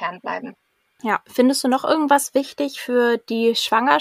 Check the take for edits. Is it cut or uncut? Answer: uncut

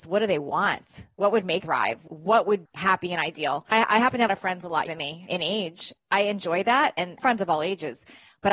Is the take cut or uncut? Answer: cut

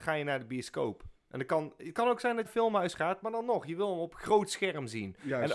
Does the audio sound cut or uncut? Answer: cut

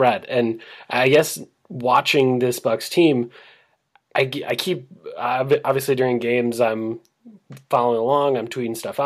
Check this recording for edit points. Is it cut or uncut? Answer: uncut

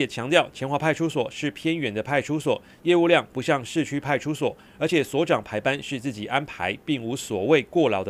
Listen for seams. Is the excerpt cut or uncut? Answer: uncut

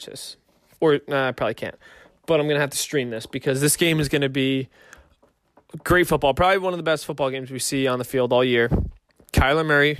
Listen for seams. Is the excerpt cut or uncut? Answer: uncut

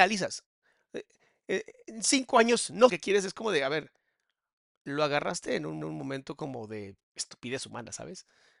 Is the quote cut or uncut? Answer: cut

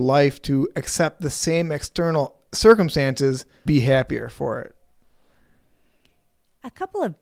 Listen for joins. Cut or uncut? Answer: cut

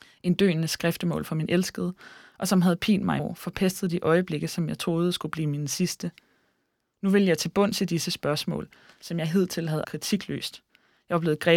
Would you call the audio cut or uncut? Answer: cut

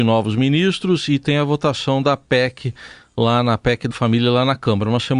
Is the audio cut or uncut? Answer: cut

